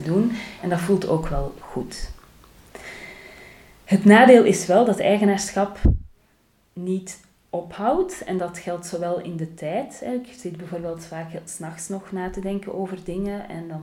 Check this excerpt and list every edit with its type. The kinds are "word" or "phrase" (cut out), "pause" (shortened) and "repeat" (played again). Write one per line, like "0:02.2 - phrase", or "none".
none